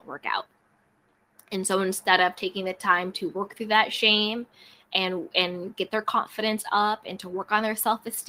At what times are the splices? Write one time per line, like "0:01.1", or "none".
none